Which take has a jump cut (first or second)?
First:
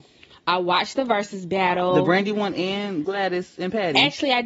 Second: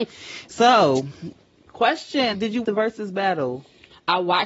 second